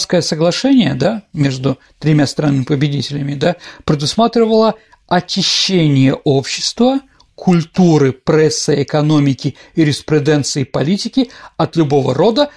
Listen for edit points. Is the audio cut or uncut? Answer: uncut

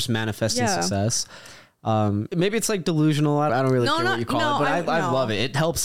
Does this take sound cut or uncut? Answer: cut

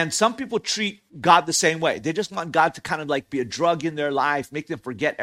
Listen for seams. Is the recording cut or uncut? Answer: cut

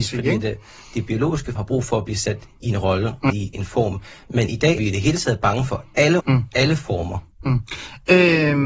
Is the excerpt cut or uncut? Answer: cut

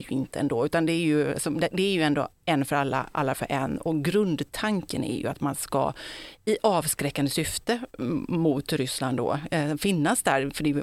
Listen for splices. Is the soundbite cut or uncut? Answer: uncut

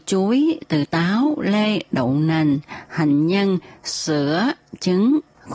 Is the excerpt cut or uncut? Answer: uncut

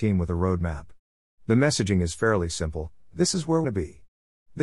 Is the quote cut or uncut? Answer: cut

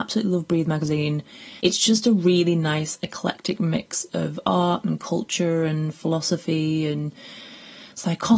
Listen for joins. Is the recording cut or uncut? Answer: cut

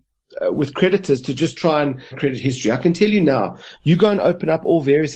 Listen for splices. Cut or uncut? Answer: cut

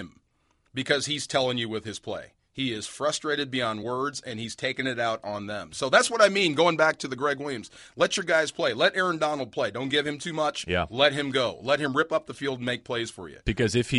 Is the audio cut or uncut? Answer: uncut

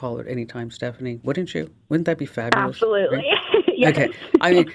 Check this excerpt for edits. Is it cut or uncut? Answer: uncut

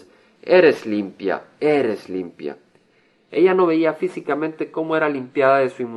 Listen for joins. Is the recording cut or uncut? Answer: uncut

